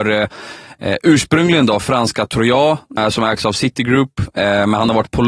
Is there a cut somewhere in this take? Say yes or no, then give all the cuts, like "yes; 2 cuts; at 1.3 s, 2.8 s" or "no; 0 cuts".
yes; 1 cut; at 3.0 s